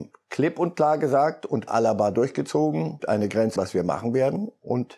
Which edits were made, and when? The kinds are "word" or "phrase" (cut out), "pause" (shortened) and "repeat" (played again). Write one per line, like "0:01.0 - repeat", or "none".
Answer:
0:01.7 - word
0:03.0 - phrase
0:03.6 - word

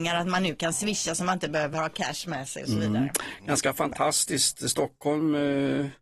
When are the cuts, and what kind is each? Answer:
none

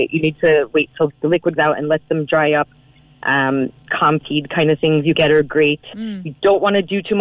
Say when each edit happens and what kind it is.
0:01.1 - word
0:01.6 - word
0:03.9 - word
0:05.1 - word

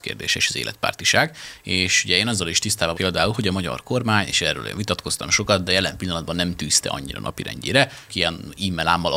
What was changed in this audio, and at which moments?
0:02.9 - word
0:08.1 - word

